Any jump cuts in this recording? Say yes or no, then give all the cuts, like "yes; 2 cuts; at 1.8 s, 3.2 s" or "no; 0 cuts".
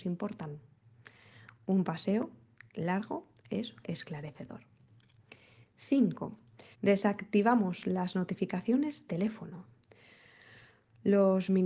yes; 3 cuts; at 3.8 s, 6.7 s, 9.1 s